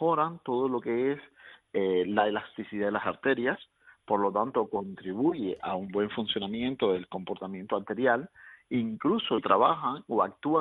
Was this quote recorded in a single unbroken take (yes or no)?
yes